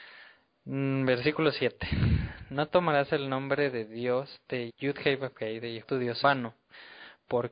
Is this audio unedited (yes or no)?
no